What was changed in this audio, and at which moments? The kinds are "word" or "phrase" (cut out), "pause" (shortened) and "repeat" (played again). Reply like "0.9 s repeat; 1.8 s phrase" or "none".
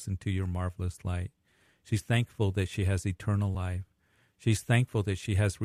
none

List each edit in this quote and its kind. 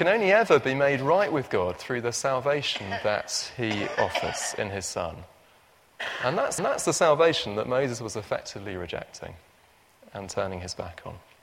6.6 s repeat

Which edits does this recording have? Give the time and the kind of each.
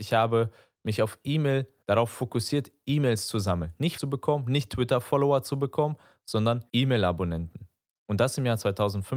1.8 s pause; 4.0 s word; 6.7 s pause

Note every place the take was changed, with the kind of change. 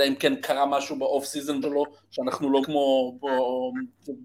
1.6 s word; 2.6 s phrase

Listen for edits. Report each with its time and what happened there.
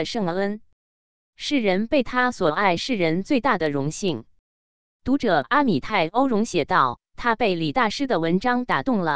none

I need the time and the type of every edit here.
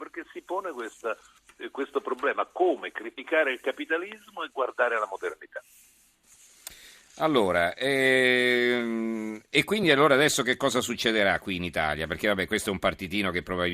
none

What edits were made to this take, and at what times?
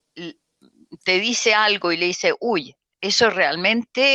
2.9 s pause

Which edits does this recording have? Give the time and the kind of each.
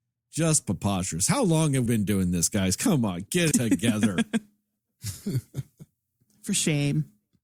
1.9 s word; 3.5 s word

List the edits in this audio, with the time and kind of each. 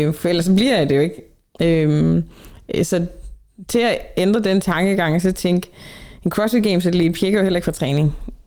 none

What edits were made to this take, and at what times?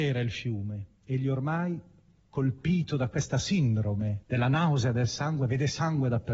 0.9 s pause; 4.2 s pause

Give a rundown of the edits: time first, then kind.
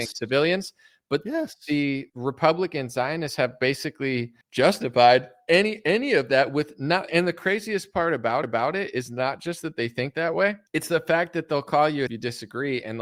2.1 s pause; 4.4 s pause; 7.1 s word; 8.4 s repeat; 10.7 s pause; 12.1 s phrase

